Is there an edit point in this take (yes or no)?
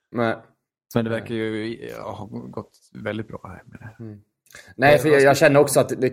no